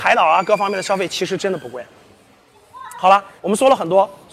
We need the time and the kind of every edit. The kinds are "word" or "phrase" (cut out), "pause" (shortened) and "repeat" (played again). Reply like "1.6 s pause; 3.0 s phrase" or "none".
3.4 s pause